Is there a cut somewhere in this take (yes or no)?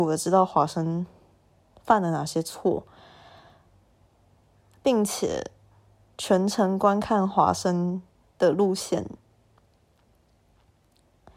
no